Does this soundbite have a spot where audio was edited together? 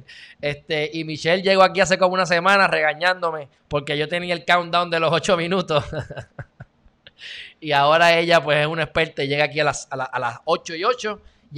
yes; 1 cut; at 3.6 s

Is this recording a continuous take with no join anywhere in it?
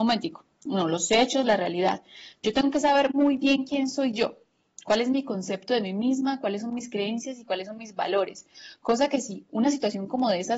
yes; 0 cuts

